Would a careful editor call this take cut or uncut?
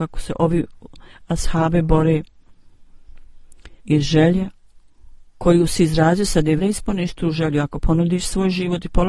cut